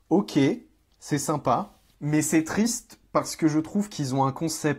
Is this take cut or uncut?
uncut